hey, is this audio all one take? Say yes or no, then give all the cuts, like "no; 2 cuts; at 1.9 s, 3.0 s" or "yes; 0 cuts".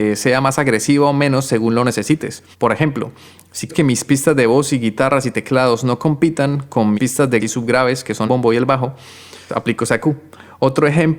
no; 6 cuts; at 2.5 s, 3.7 s, 7.0 s, 7.4 s, 8.3 s, 9.5 s